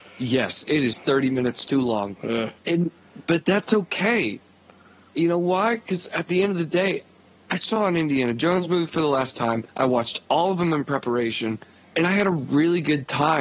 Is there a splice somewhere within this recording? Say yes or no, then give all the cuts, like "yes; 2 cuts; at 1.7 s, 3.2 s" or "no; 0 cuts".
yes; 2 cuts; at 2.6 s, 9.7 s